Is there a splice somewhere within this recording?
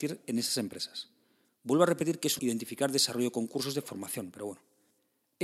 yes; 1 cut; at 2.4 s

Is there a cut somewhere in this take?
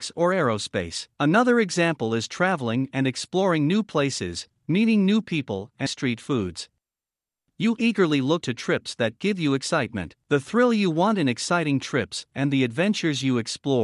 yes; 3 cuts; at 1.1 s, 5.9 s, 8.4 s

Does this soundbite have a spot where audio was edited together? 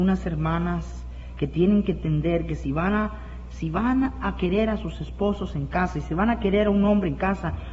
no; 0 cuts

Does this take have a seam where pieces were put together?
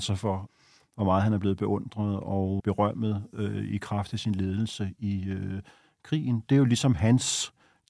no; 0 cuts

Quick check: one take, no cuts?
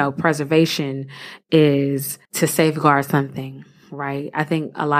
no; 1 cut; at 2.2 s

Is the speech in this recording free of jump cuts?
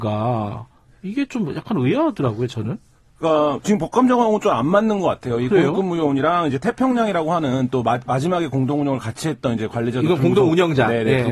yes; 0 cuts

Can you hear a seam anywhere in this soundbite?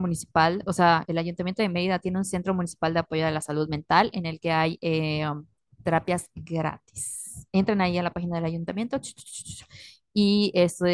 no; 0 cuts

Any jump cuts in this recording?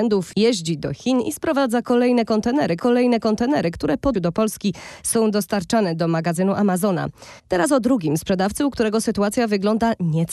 yes; 3 cuts; at 2.8 s, 4.1 s, 7.4 s

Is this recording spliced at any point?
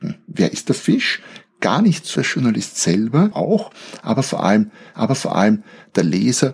yes; 3 cuts; at 2.2 s, 3.3 s, 4.9 s

